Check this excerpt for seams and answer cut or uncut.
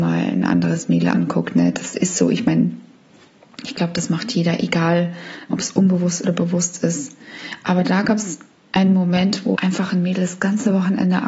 cut